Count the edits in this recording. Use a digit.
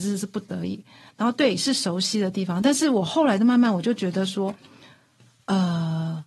0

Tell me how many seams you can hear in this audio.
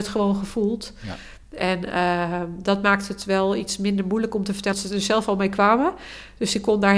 1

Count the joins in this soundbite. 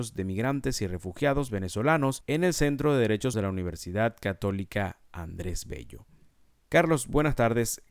1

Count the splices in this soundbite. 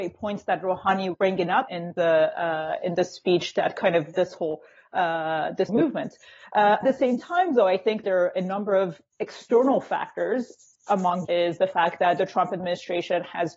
7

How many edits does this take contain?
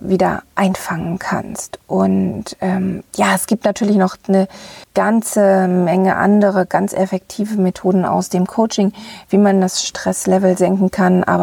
1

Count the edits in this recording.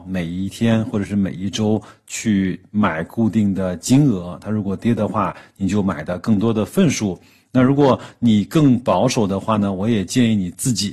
0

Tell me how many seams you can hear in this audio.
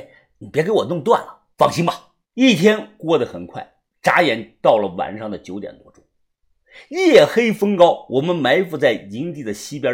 2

